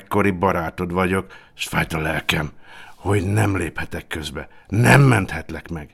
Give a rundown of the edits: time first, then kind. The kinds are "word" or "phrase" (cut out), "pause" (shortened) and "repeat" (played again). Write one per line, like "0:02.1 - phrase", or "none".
none